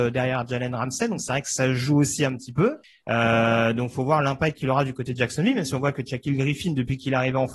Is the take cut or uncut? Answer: cut